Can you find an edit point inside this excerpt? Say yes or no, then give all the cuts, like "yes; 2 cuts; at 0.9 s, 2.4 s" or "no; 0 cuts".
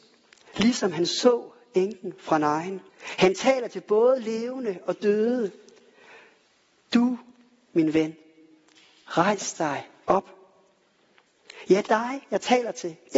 yes; 2 cuts; at 2.9 s, 11.9 s